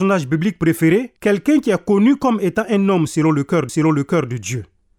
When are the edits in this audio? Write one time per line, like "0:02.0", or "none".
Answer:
0:01.2
0:03.7

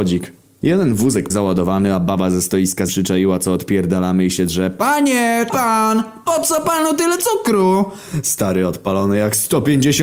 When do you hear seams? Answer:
0:01.3
0:02.9
0:05.5

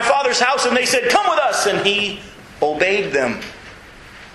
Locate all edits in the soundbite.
none

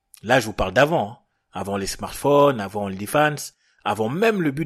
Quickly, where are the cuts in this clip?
none

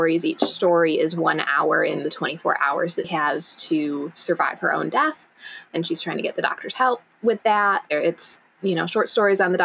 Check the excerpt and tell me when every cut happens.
0:03.0

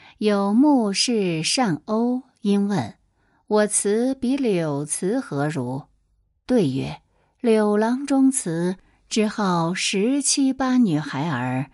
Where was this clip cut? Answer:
none

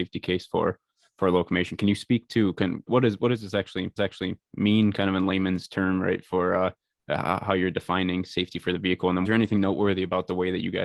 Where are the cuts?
0:02.9
0:04.0
0:09.3

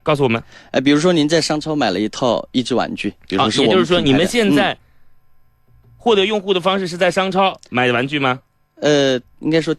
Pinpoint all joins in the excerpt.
none

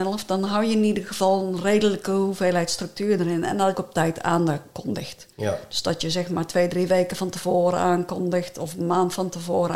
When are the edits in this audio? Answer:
0:03.7
0:05.3

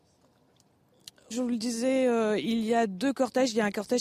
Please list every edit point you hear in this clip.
0:01.3

